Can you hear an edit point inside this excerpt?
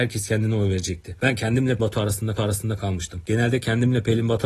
yes; 2 cuts; at 1.8 s, 2.4 s

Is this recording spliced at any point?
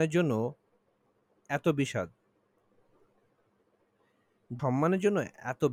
yes; 1 cut; at 4.6 s

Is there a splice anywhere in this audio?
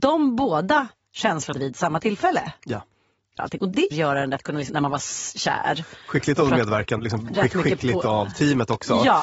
yes; 6 cuts; at 1.5 s, 3.4 s, 3.9 s, 4.4 s, 4.7 s, 7.0 s

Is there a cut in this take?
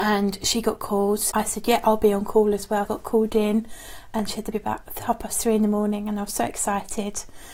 yes; 3 cuts; at 1.3 s, 2.9 s, 4.5 s

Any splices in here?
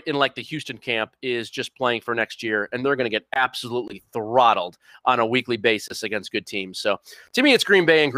no; 0 cuts

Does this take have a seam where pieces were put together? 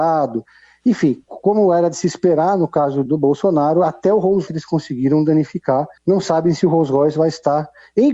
yes; 3 cuts; at 3.1 s, 4.5 s, 6.0 s

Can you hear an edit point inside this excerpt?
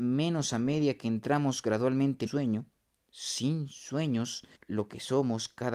yes; 2 cuts; at 2.3 s, 4.6 s

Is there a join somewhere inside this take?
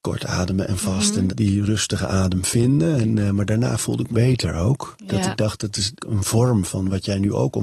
yes; 3 cuts; at 1.3 s, 4.1 s, 6.0 s

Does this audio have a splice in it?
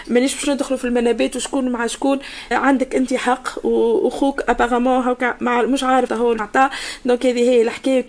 yes; 3 cuts; at 2.5 s, 6.1 s, 6.4 s

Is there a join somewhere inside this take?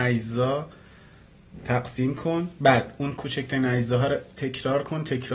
no; 0 cuts

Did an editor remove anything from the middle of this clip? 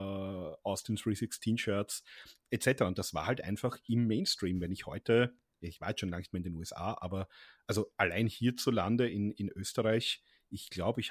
no; 0 cuts

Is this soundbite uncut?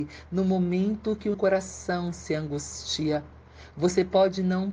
no; 1 cut; at 1.3 s

